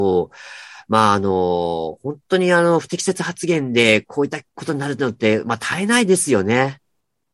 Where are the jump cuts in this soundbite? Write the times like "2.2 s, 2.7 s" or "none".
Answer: 4.5 s